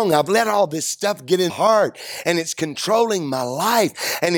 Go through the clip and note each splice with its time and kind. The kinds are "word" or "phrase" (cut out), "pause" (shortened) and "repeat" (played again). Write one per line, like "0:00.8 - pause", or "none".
0:01.5 - word